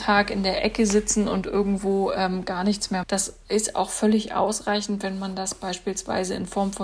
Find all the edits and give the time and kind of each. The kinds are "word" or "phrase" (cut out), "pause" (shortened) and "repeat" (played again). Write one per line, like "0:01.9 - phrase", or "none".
0:03.0 - phrase